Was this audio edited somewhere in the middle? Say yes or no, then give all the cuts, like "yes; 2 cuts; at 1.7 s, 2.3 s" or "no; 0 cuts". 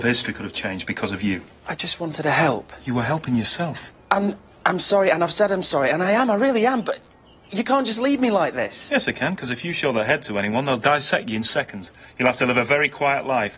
no; 0 cuts